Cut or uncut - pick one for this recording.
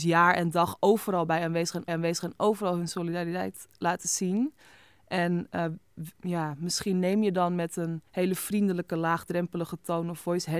cut